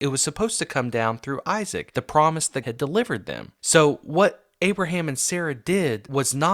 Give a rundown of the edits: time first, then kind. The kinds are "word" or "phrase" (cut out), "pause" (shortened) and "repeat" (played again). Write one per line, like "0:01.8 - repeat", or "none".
0:02.6 - word

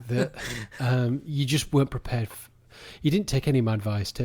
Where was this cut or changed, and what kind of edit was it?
none

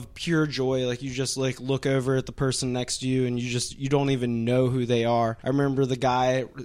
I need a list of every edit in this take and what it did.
0:05.4 - pause

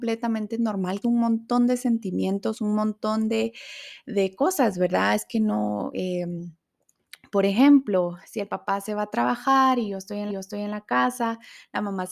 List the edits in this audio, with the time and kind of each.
0:01.0 - phrase
0:08.2 - pause
0:10.3 - repeat

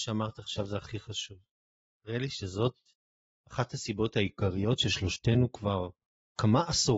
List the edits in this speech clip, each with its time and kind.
none

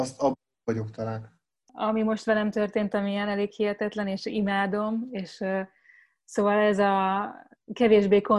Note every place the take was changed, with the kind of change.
none

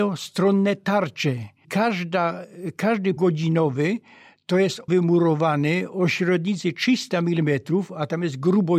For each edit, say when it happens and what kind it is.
0:01.6 - word
0:03.2 - word
0:04.9 - word

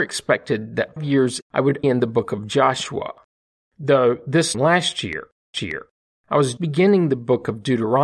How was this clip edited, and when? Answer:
0:01.0 - word
0:01.4 - word
0:01.8 - phrase
0:04.5 - word
0:05.5 - repeat
0:06.6 - word

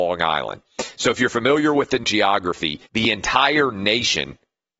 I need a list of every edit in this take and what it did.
0:02.0 - word
0:02.9 - pause

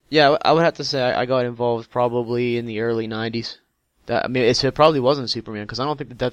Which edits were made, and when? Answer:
none

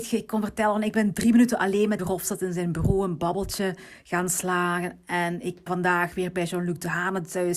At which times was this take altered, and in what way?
0:02.0 - word
0:05.7 - word

